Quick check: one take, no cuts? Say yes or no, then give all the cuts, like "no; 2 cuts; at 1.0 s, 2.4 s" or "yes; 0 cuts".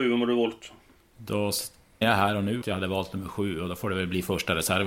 no; 2 cuts; at 2.0 s, 2.6 s